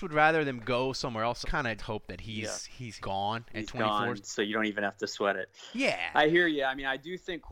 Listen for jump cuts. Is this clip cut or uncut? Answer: cut